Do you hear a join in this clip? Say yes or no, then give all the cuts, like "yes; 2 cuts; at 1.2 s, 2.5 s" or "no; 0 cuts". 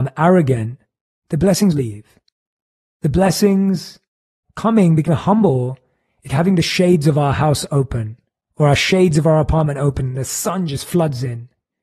yes; 4 cuts; at 1.7 s, 4.5 s, 5.1 s, 6.3 s